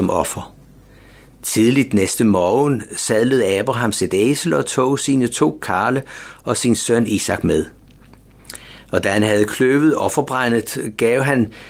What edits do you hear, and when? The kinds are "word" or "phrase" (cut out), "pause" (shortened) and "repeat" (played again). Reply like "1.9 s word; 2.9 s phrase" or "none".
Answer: none